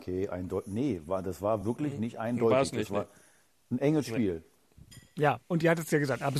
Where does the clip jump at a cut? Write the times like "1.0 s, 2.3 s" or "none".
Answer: none